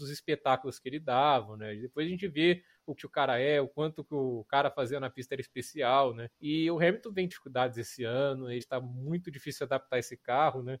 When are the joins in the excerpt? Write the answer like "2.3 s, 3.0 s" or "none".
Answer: 3.0 s, 6.3 s, 7.3 s, 8.6 s